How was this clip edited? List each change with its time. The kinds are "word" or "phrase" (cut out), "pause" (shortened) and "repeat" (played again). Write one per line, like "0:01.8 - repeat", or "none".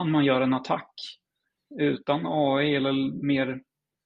none